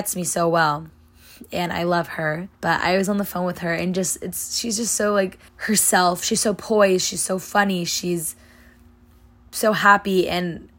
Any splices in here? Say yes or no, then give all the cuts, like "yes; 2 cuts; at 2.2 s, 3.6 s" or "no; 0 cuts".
yes; 2 cuts; at 2.5 s, 5.5 s